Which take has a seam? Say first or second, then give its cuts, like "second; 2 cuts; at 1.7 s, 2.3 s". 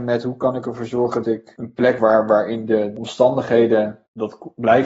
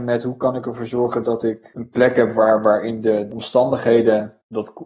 first; 2 cuts; at 1.2 s, 2.0 s